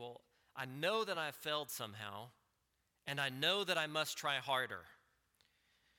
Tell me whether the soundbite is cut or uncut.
uncut